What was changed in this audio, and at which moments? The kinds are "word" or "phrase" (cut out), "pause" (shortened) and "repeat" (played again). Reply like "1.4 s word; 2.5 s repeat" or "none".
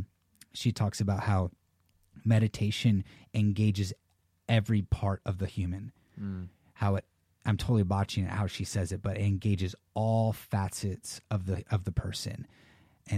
none